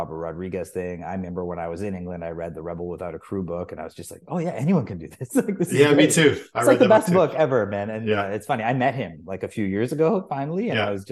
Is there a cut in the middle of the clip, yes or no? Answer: no